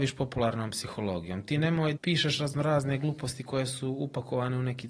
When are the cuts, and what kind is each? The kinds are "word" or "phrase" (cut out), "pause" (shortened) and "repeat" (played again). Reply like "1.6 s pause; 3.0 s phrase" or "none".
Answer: 2.0 s word